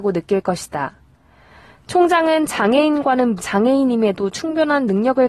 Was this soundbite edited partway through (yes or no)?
yes